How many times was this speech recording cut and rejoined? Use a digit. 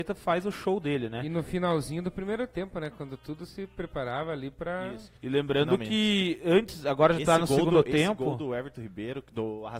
1